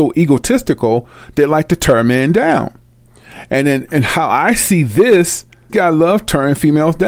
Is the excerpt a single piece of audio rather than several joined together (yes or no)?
no